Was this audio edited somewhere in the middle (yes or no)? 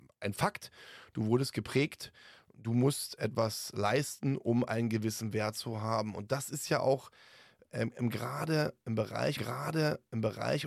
yes